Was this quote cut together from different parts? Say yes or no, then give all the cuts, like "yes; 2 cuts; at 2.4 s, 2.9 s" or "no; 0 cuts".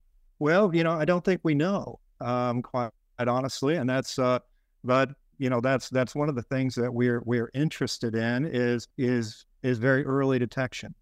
yes; 1 cut; at 8.9 s